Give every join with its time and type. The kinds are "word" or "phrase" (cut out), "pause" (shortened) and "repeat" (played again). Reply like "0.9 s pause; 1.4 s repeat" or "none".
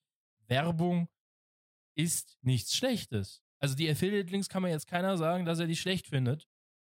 none

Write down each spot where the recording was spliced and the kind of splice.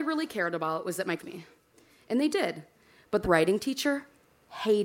1.2 s phrase; 3.2 s phrase

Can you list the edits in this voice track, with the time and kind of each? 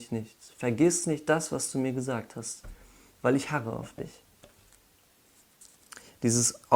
none

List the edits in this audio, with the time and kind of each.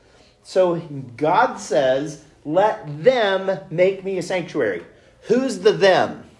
none

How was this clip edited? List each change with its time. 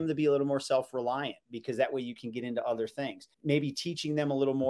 3.3 s pause

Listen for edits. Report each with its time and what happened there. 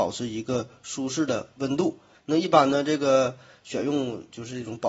2.1 s pause

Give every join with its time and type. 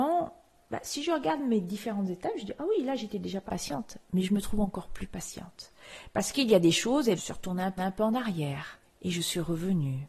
3.5 s word; 7.2 s phrase; 7.8 s repeat; 8.8 s pause

